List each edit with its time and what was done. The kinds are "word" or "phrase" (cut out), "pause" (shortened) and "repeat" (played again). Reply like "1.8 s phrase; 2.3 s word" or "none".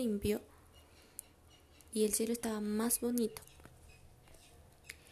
none